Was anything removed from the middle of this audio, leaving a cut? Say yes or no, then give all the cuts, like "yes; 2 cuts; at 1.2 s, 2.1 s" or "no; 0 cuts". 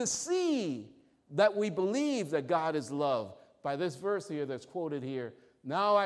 no; 0 cuts